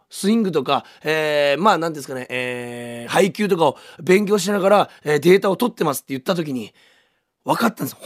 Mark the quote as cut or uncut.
uncut